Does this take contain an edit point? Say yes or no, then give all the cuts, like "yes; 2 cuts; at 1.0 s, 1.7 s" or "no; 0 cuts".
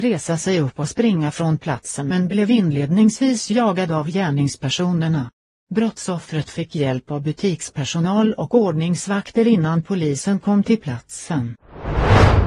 no; 0 cuts